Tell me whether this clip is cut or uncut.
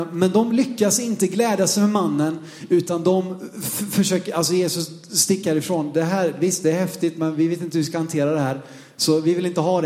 uncut